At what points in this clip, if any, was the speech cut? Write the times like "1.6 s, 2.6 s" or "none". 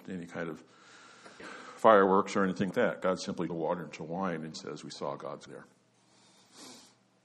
1.4 s, 2.7 s, 3.5 s, 4.5 s, 5.5 s